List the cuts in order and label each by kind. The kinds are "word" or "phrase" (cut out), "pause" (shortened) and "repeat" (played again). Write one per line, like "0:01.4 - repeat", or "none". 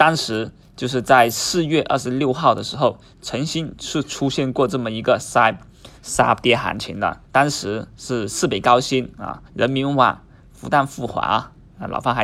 0:06.0 - pause
0:07.2 - pause
0:09.5 - pause